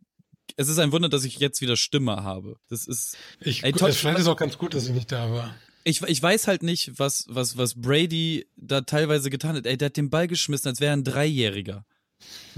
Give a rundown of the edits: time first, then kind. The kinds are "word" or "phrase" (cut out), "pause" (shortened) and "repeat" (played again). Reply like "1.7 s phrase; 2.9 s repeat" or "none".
2.6 s pause; 3.3 s pause